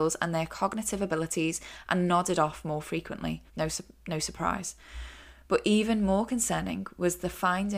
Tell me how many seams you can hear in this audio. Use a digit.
1